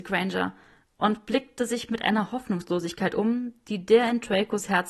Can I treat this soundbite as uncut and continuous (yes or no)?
yes